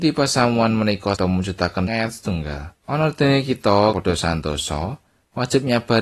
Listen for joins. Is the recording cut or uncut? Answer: cut